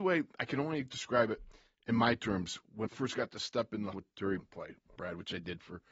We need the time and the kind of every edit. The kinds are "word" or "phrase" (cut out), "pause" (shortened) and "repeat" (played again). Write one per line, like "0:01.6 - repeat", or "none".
0:02.9 - word
0:03.9 - word
0:04.4 - word
0:05.0 - word